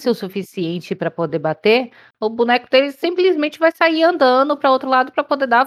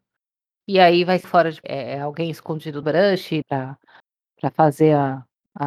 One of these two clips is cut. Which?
second; 4 cuts; at 1.2 s, 1.6 s, 2.8 s, 3.4 s

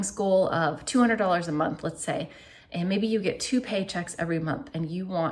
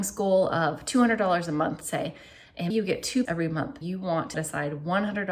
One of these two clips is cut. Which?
second; 5 cuts; at 1.8 s, 2.7 s, 3.3 s, 3.8 s, 4.3 s

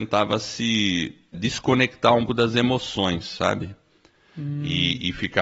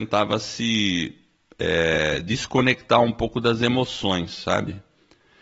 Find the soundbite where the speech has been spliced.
first; 2 cuts; at 1.3 s, 2.3 s

